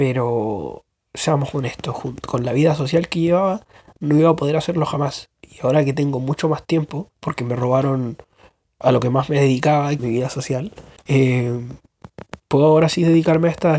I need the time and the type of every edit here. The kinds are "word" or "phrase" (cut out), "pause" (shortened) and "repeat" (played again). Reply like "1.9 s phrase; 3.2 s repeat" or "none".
7.1 s pause; 10.0 s word; 11.0 s pause